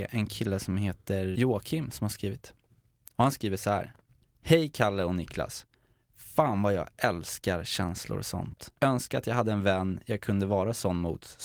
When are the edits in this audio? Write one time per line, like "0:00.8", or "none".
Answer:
0:01.3
0:04.3
0:08.8